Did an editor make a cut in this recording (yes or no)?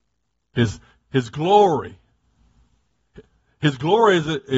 no